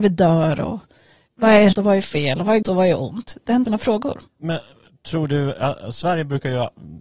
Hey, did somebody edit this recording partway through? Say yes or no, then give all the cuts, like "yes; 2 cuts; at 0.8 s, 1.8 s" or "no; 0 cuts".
yes; 4 cuts; at 1.7 s, 2.6 s, 3.7 s, 4.3 s